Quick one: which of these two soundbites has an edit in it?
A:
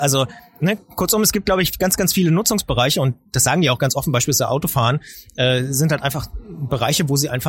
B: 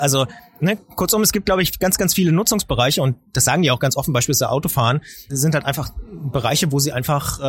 B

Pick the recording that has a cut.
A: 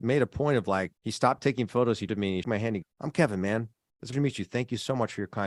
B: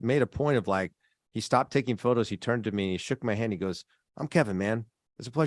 A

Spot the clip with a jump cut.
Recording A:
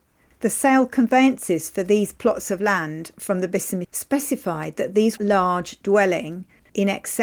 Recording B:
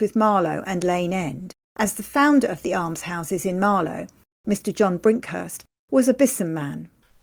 A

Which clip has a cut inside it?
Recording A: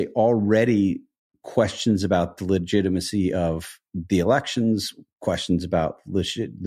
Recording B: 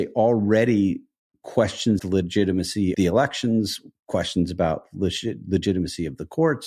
B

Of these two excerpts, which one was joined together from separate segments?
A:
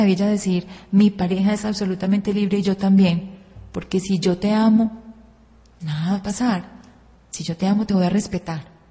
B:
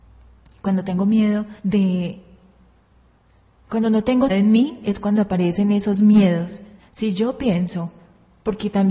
B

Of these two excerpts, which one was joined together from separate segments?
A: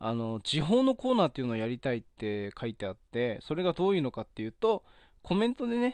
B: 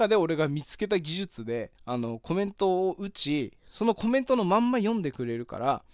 B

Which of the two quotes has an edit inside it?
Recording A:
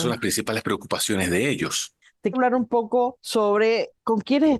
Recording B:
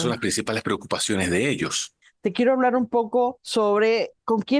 A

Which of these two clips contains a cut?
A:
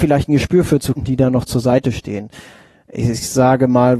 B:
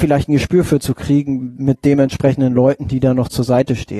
A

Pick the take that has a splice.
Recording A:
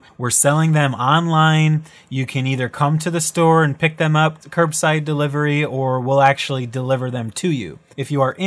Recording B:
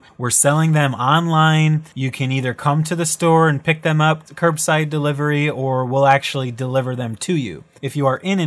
B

